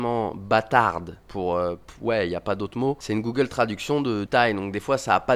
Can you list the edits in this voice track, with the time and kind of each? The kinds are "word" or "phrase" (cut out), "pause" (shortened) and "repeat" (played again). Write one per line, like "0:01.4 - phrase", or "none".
0:04.3 - word